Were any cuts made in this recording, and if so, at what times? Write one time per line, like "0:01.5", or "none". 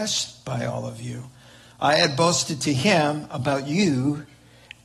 none